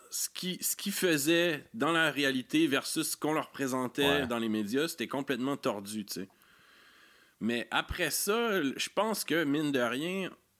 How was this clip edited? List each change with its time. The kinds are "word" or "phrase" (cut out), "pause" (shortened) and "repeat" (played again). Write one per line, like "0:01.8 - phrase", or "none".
none